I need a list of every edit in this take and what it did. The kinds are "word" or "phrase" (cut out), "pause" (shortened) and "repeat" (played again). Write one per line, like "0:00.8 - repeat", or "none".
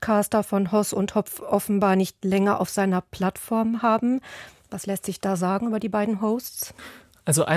none